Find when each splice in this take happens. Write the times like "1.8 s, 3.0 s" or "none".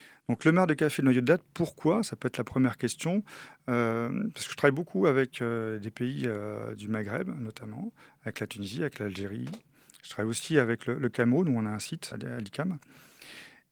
12.1 s